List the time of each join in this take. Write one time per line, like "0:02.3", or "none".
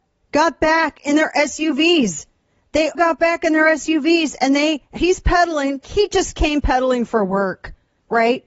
0:02.9
0:05.0
0:05.8